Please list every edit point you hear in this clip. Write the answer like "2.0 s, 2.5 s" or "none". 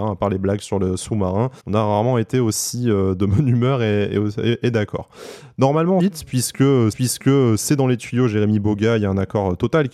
1.6 s, 6.0 s, 6.9 s